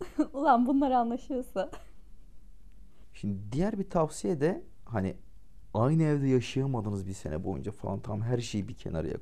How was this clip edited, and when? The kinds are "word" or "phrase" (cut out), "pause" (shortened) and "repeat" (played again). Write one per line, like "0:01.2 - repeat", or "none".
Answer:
none